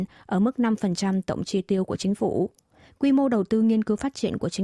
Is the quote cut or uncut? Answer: uncut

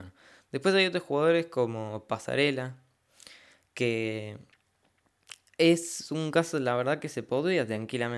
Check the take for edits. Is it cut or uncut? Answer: uncut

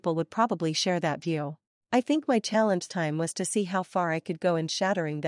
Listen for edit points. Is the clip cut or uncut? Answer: cut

